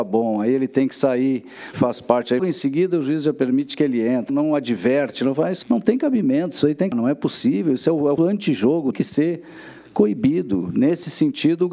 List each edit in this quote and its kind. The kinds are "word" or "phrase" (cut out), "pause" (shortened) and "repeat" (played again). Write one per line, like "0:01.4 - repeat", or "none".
0:01.7 - word
0:02.4 - word
0:04.3 - word
0:05.6 - word
0:06.9 - word
0:08.2 - word
0:08.9 - word